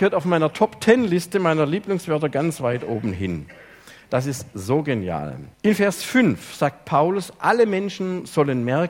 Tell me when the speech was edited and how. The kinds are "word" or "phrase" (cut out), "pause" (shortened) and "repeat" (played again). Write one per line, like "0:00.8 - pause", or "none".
0:05.5 - pause